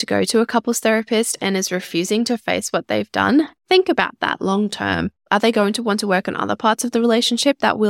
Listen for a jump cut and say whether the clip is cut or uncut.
uncut